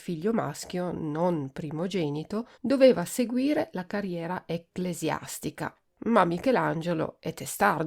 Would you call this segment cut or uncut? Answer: cut